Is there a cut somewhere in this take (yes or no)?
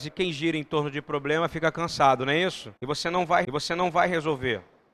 yes